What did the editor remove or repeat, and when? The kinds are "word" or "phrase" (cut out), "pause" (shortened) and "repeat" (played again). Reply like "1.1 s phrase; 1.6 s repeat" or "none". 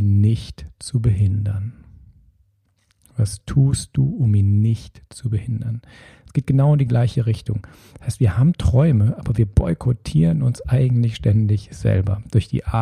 none